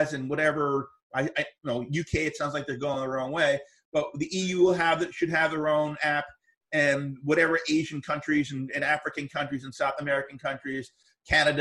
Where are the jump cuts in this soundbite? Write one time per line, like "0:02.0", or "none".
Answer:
none